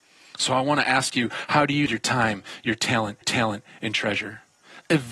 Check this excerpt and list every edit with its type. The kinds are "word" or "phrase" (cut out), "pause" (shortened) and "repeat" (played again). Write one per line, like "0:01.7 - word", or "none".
0:01.9 - word
0:03.2 - repeat